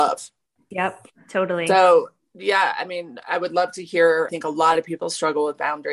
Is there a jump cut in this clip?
yes; 1 cut; at 4.3 s

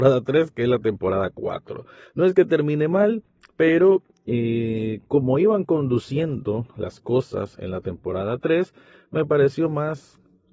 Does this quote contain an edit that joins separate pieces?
no; 0 cuts

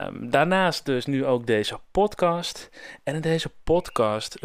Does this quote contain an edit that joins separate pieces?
no; 0 cuts

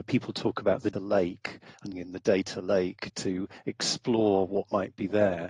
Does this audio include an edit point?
yes; 2 cuts; at 0.9 s, 1.9 s

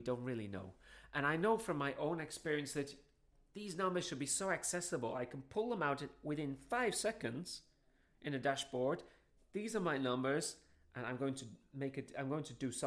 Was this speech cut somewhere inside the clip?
no; 0 cuts

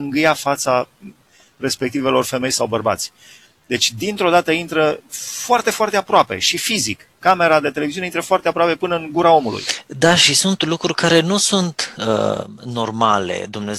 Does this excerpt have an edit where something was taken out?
no; 0 cuts

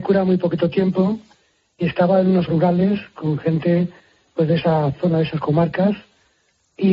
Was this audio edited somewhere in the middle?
yes; 1 cut; at 2.5 s

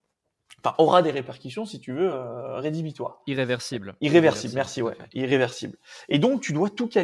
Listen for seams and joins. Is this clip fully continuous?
yes; 0 cuts

